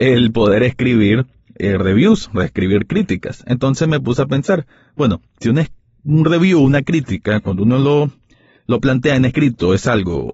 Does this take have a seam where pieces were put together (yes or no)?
no